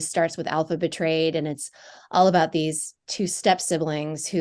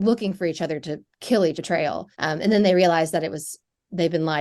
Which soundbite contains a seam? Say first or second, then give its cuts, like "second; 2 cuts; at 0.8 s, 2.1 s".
second; 2 cuts; at 1.5 s, 2.1 s